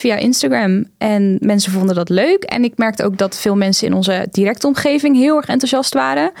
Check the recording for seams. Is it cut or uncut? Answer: uncut